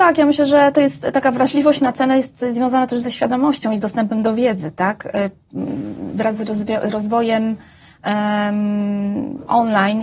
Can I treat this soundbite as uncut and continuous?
yes; 0 cuts

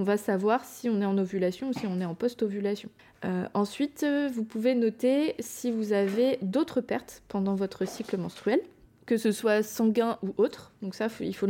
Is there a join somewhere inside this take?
no; 0 cuts

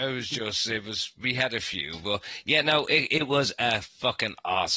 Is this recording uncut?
yes; 0 cuts

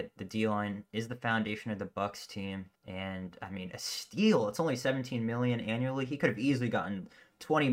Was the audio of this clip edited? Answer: yes; 1 cut; at 2.7 s

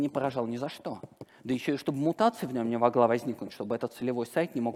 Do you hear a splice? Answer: no; 0 cuts

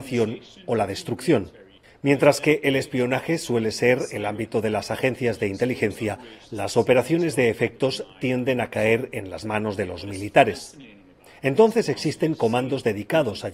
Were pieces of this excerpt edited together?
no; 0 cuts

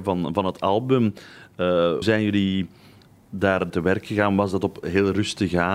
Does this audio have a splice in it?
yes; 3 cuts; at 2.0 s, 3.7 s, 4.8 s

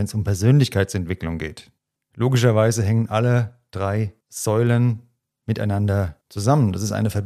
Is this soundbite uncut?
no; 3 cuts; at 1.8 s, 4.2 s, 6.2 s

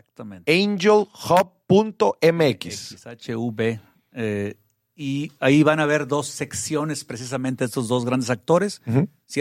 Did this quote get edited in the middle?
no; 0 cuts

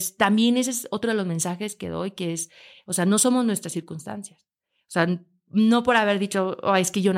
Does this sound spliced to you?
no; 0 cuts

